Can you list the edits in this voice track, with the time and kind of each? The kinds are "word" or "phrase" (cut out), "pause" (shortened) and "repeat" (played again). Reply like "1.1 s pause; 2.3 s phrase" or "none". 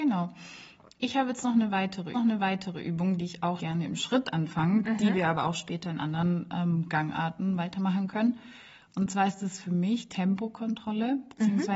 2.1 s repeat; 3.6 s word; 10.1 s word